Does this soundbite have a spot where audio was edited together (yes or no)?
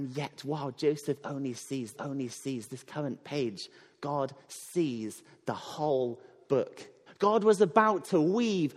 yes